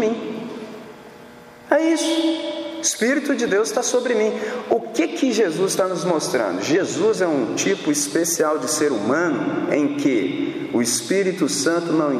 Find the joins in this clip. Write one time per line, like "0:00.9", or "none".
none